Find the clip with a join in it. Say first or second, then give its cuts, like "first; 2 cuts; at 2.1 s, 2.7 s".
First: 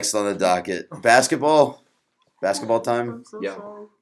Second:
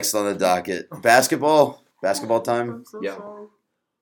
second; 1 cut; at 1.9 s